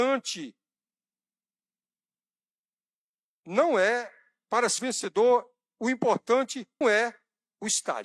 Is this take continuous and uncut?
no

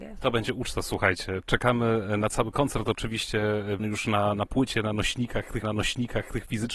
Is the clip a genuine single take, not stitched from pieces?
no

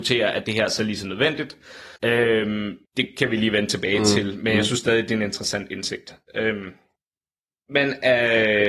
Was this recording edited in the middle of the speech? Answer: yes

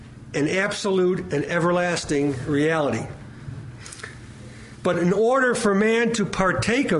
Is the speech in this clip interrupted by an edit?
no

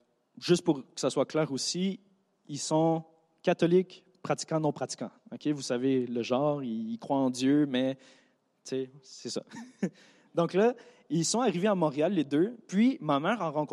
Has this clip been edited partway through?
no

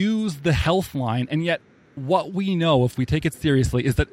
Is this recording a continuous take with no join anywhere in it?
yes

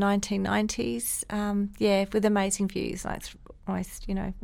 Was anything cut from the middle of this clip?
no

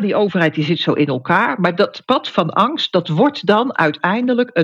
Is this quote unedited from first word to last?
yes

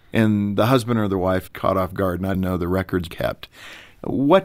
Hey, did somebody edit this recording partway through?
yes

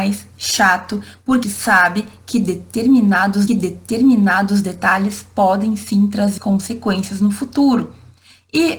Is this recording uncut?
no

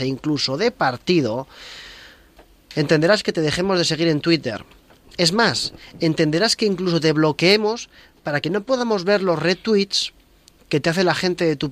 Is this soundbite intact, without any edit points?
yes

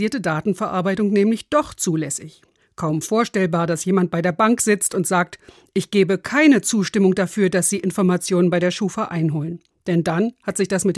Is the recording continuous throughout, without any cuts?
yes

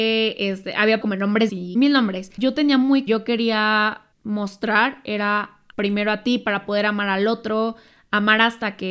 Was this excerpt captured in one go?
no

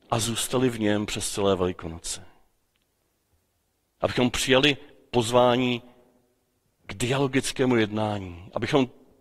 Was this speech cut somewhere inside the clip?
no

